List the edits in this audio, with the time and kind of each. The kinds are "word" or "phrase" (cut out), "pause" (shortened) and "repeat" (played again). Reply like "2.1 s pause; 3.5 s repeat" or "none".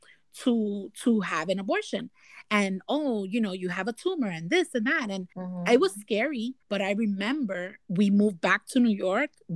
5.3 s pause; 6.6 s pause